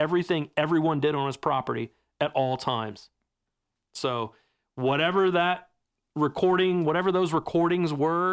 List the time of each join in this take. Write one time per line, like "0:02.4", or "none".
none